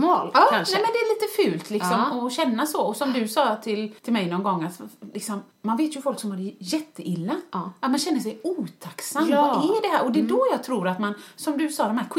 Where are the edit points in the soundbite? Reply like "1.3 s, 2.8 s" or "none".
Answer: 4.0 s, 5.5 s